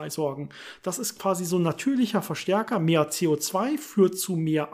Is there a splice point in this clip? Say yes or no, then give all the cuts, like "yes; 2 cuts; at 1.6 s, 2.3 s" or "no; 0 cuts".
no; 0 cuts